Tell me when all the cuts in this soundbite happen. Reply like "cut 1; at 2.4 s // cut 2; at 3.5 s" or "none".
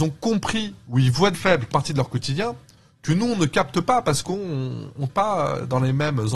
cut 1; at 1.3 s // cut 2; at 1.7 s // cut 3; at 5.1 s